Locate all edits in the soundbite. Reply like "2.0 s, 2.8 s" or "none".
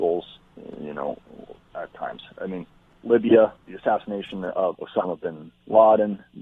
1.7 s, 3.6 s, 4.7 s